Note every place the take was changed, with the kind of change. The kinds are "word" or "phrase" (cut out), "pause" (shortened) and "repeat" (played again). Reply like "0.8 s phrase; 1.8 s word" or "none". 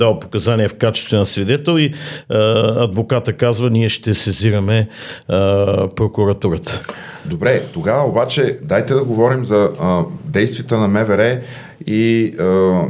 none